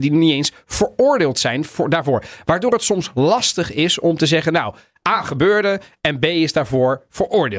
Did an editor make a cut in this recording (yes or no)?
no